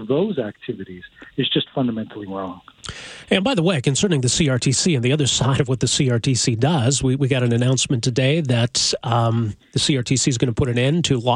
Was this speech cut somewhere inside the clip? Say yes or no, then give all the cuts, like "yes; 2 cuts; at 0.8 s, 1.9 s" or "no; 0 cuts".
no; 0 cuts